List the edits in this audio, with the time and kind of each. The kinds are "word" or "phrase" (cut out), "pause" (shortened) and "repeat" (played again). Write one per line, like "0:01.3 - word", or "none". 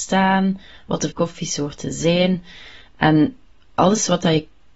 0:01.1 - word